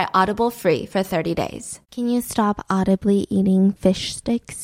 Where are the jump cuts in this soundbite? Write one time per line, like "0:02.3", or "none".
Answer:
0:01.8